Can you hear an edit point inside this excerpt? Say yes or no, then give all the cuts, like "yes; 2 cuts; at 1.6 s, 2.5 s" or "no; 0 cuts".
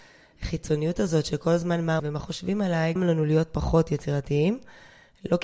yes; 2 cuts; at 2.0 s, 3.0 s